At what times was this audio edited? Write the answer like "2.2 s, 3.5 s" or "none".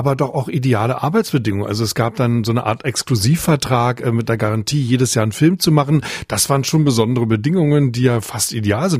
none